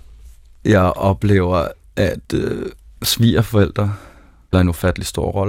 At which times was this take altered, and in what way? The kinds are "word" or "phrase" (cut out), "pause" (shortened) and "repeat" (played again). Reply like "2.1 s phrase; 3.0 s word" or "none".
2.2 s pause; 4.5 s word